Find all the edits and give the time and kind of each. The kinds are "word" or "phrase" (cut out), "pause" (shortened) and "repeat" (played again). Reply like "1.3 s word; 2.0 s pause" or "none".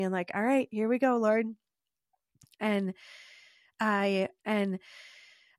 4.4 s repeat